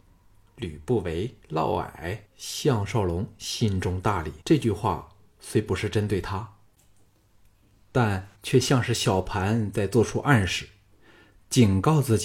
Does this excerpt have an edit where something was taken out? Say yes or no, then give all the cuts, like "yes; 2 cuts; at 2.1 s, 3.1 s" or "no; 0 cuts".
yes; 4 cuts; at 1.4 s, 2.2 s, 4.4 s, 8.3 s